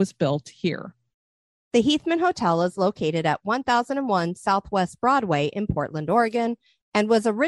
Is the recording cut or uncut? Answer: uncut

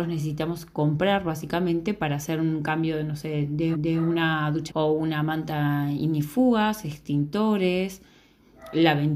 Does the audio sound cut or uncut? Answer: cut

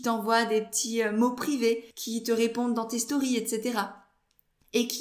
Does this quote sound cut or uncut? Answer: cut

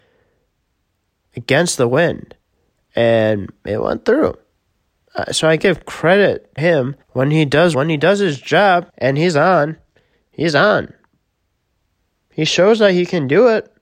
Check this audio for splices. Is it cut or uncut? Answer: cut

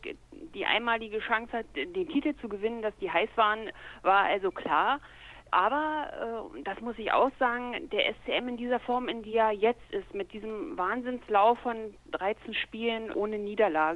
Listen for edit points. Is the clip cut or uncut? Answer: uncut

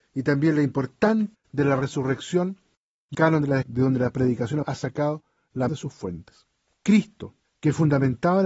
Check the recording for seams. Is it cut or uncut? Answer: cut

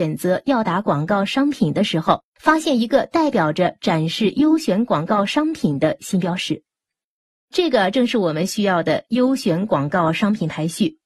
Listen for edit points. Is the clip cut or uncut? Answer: cut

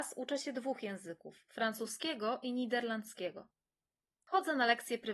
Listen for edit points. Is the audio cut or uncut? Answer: uncut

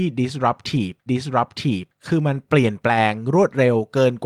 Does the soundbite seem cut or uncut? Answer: cut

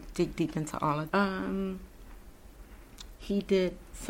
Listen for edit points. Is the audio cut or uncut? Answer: cut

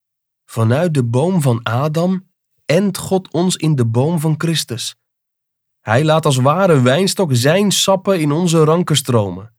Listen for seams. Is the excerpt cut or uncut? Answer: uncut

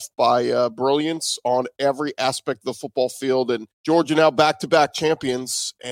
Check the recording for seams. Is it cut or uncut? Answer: cut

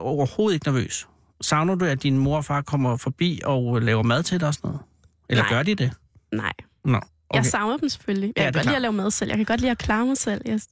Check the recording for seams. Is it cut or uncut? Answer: uncut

